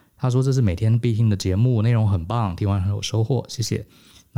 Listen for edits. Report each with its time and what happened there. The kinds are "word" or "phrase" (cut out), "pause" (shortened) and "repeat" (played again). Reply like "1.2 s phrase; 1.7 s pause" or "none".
none